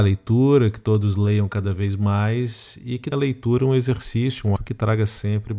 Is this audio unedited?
no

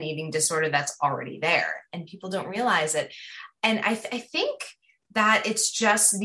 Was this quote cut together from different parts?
no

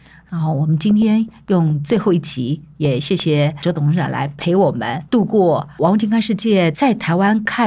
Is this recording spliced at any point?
yes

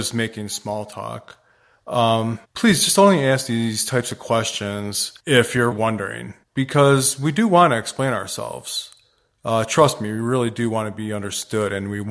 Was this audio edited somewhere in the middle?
yes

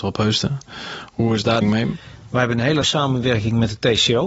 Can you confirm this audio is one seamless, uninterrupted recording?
no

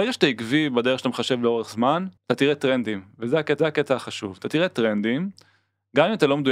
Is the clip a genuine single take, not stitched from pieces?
no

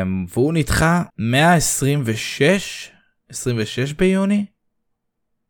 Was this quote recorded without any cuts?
no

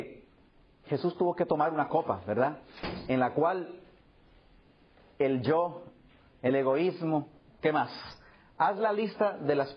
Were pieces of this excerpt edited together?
no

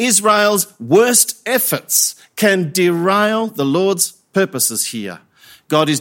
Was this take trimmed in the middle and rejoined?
no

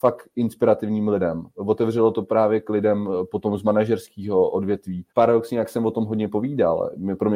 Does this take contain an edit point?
yes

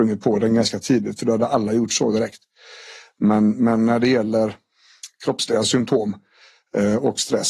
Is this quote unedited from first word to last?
yes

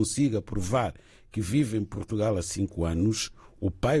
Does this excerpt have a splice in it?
no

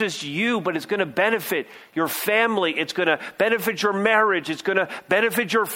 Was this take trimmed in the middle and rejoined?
no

